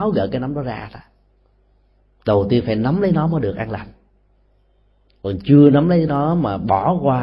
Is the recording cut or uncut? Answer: uncut